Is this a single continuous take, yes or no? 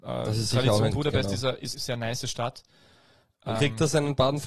no